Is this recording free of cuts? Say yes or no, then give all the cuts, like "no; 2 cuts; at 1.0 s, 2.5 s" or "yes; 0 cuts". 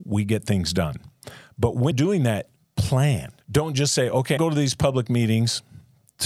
no; 3 cuts; at 1.9 s, 3.4 s, 4.4 s